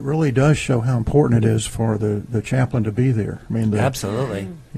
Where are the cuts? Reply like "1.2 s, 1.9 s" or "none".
none